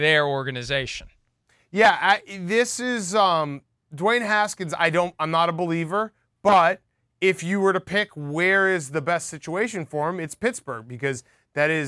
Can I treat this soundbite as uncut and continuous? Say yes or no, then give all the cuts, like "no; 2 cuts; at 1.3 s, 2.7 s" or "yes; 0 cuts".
yes; 0 cuts